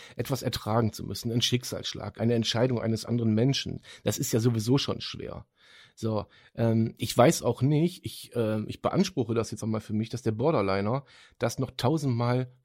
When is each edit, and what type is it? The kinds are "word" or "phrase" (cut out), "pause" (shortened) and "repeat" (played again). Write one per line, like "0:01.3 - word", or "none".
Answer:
0:02.2 - word
0:09.6 - word